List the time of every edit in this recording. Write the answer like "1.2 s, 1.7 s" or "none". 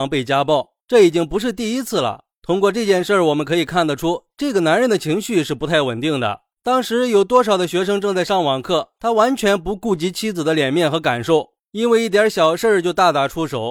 none